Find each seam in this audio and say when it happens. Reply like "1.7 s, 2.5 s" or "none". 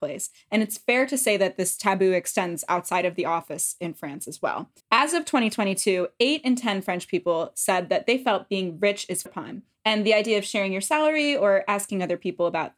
4.8 s, 9.3 s